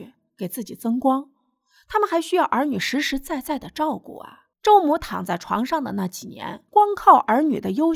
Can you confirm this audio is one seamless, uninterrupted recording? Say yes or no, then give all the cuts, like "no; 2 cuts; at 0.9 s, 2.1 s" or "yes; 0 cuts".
no; 2 cuts; at 4.5 s, 6.7 s